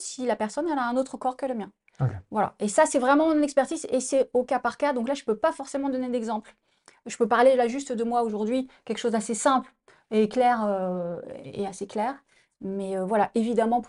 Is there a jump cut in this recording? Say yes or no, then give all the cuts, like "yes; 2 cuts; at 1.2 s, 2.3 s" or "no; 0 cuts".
no; 0 cuts